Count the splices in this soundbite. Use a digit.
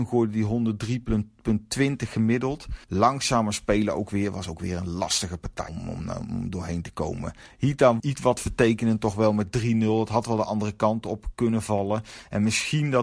3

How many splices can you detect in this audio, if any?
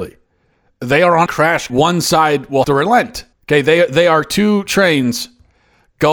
4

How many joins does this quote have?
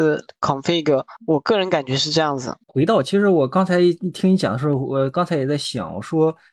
1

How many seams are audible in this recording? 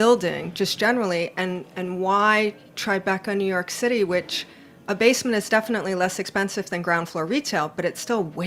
0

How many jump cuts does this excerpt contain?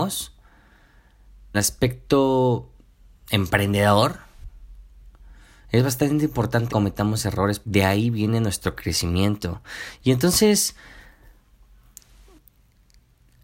3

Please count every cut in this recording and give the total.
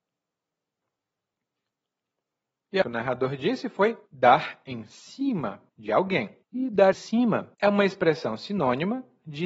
6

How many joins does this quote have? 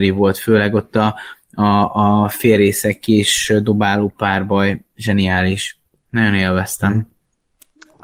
0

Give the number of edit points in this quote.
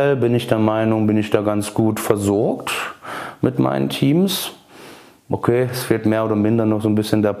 0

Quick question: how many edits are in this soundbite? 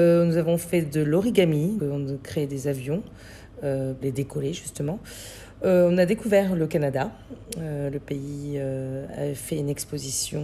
2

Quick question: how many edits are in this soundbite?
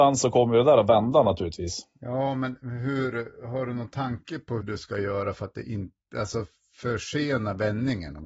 1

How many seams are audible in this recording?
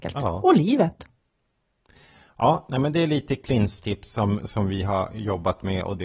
0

